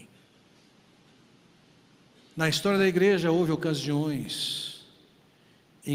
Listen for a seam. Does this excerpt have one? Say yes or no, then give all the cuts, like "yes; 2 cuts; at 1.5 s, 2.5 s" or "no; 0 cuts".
no; 0 cuts